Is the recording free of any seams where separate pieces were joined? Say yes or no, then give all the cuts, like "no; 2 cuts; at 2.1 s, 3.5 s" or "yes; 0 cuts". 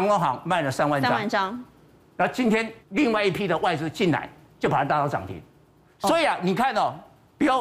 no; 1 cut; at 2.8 s